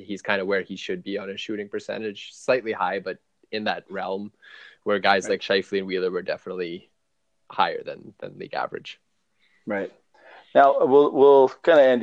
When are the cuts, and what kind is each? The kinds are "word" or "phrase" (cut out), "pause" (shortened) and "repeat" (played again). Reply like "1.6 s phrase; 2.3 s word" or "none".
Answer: none